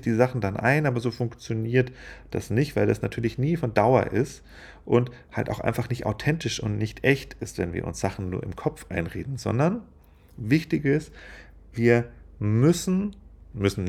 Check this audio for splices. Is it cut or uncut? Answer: uncut